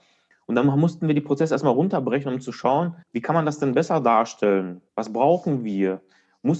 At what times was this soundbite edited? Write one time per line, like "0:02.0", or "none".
0:03.0
0:04.9